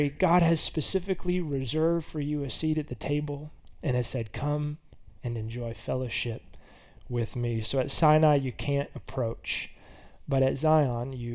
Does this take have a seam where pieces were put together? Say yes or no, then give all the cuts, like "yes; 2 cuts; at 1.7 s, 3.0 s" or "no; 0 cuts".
no; 0 cuts